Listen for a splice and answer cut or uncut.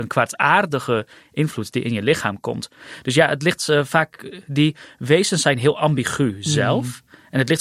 uncut